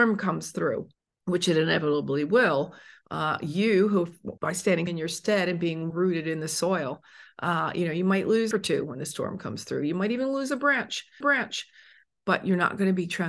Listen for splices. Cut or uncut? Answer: cut